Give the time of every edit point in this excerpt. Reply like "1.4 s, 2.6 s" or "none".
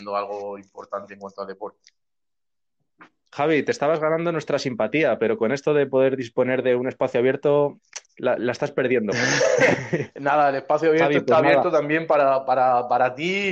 none